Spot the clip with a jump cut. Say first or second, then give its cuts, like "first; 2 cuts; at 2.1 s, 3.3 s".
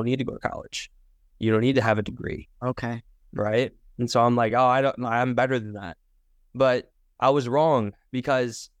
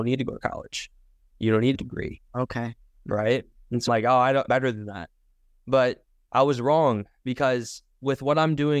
second; 3 cuts; at 1.7 s, 3.9 s, 4.5 s